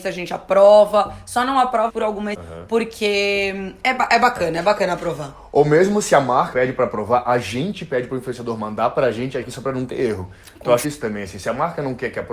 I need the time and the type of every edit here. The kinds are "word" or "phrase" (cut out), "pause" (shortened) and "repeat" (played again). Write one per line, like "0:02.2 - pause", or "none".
0:01.9 - word
0:02.3 - word
0:06.5 - word
0:09.4 - phrase
0:10.8 - word